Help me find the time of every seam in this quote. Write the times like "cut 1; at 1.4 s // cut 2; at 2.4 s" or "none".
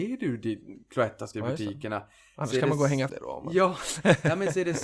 cut 1; at 1.3 s // cut 2; at 3.1 s